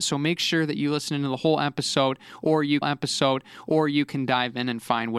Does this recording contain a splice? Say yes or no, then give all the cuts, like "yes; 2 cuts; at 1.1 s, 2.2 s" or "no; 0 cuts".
yes; 1 cut; at 2.8 s